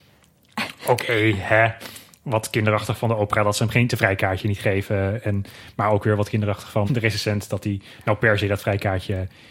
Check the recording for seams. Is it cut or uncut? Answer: cut